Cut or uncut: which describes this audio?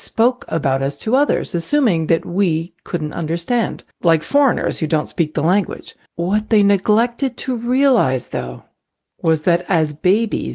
cut